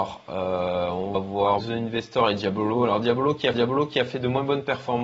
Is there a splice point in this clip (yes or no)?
yes